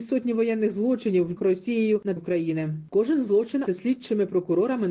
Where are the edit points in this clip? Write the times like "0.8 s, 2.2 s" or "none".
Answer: 1.4 s, 2.2 s, 3.7 s

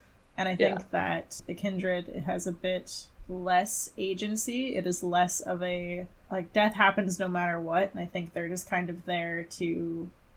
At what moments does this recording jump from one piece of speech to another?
none

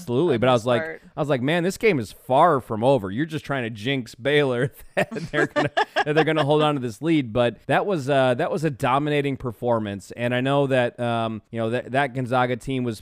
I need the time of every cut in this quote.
7.6 s, 11.5 s

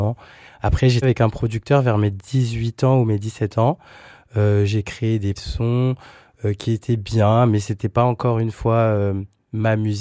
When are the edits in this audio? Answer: 1.0 s, 5.4 s

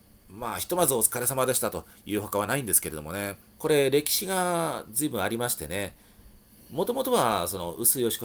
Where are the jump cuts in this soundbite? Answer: 3.5 s

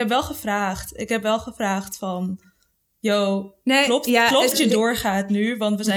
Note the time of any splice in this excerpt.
4.5 s

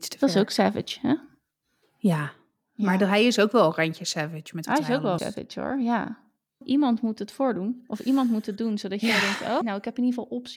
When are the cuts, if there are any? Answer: 5.2 s, 6.6 s, 9.6 s

